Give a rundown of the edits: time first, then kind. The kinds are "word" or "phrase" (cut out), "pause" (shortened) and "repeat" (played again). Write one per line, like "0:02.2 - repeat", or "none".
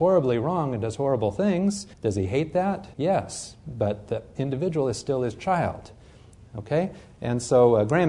0:01.9 - pause
0:02.9 - pause